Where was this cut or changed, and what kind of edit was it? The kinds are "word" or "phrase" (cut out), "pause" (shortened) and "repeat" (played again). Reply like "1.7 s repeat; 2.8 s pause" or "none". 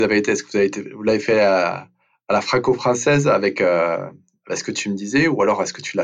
none